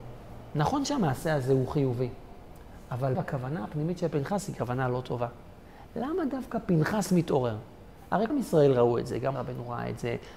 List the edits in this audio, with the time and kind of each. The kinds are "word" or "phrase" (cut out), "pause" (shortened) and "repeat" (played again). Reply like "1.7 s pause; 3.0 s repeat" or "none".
3.1 s word; 8.3 s word; 9.3 s word